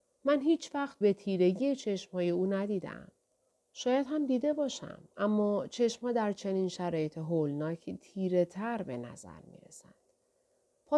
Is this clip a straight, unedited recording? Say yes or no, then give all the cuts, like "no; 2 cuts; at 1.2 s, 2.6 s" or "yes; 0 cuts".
no; 2 cuts; at 1.0 s, 3.2 s